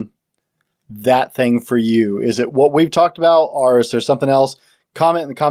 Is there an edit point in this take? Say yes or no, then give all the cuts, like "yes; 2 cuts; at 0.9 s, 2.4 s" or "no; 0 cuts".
no; 0 cuts